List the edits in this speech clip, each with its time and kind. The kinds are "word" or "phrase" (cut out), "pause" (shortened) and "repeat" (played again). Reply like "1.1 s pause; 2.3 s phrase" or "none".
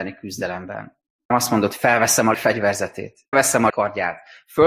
1.3 s word; 2.3 s word; 3.3 s word; 3.7 s word